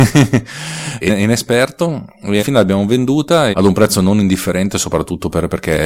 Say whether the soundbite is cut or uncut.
cut